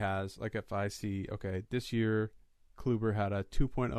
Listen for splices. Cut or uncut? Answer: uncut